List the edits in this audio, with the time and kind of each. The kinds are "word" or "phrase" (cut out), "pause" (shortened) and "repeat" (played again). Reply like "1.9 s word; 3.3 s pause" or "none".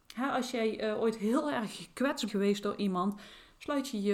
2.3 s word

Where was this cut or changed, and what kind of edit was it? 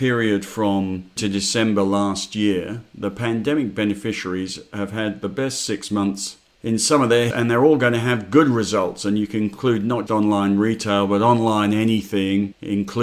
1.2 s word; 7.3 s word; 10.1 s word

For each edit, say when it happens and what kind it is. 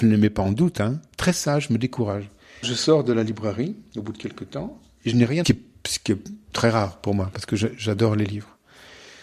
2.6 s word; 5.4 s phrase

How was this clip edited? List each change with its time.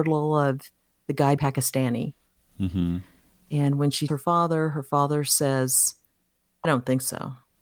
1.4 s word; 4.1 s word; 6.6 s word

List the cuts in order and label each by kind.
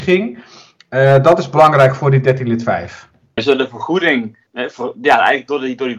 3.4 s word; 4.5 s word

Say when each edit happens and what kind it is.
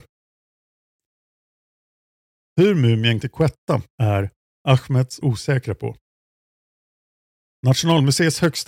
3.2 s word; 3.9 s pause; 5.2 s phrase

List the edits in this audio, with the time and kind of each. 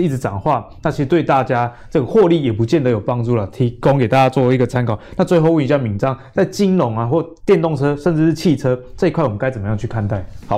7.4 s pause

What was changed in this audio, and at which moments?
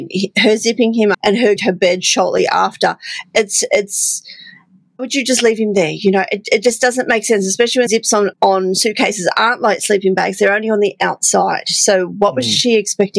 1.1 s word; 1.6 s word; 5.0 s word; 7.9 s word; 8.3 s word

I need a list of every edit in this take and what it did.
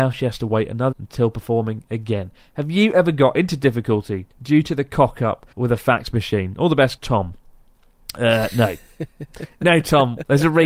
0.9 s word; 4.3 s pause; 5.5 s pause; 7.0 s word

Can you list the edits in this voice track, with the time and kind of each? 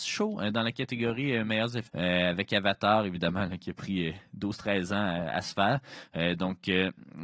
1.9 s word

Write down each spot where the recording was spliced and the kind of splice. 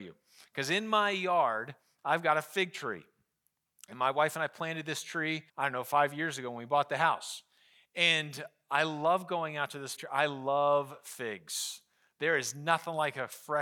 5.5 s pause; 10.0 s word

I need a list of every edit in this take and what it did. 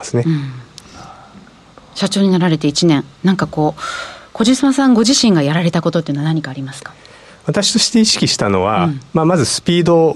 none

